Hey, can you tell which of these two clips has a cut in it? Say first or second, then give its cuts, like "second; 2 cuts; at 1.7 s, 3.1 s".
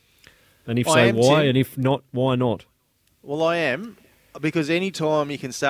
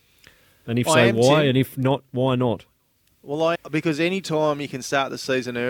second; 1 cut; at 3.5 s